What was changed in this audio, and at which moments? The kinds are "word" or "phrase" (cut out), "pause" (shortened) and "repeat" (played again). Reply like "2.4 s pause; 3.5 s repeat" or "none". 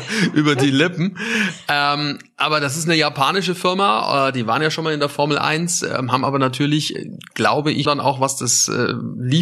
7.9 s word